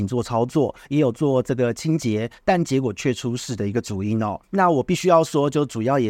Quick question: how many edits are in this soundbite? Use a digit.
1